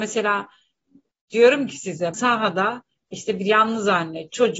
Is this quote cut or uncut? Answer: cut